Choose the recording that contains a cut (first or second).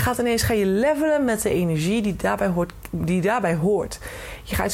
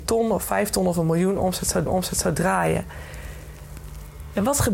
second